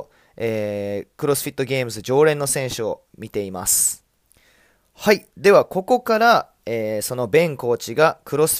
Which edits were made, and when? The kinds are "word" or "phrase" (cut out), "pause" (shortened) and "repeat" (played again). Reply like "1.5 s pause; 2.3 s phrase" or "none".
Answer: 4.2 s pause